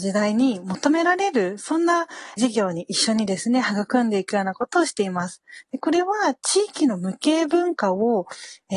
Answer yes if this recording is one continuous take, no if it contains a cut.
no